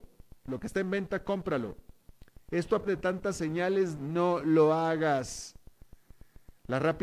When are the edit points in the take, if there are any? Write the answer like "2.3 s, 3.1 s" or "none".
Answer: 2.8 s, 3.9 s